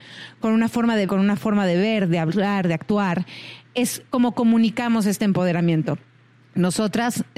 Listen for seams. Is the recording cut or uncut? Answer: cut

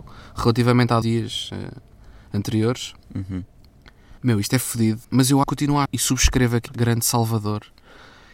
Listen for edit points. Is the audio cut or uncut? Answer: cut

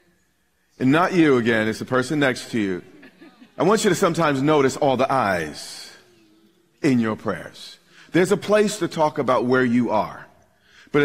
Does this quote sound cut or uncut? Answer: uncut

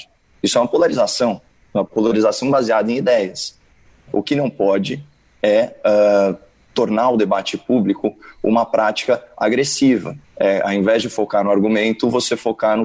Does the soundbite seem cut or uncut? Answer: cut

